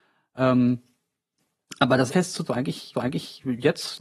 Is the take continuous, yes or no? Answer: no